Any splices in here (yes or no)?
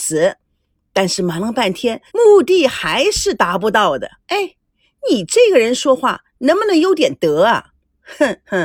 yes